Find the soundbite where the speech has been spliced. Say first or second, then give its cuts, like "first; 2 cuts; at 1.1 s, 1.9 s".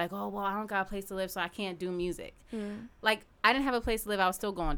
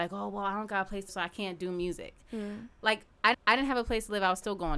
second; 2 cuts; at 1.1 s, 3.3 s